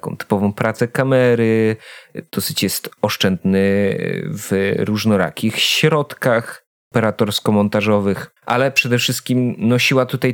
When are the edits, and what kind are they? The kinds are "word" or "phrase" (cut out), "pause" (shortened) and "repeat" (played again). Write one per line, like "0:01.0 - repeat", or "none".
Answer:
0:08.4 - pause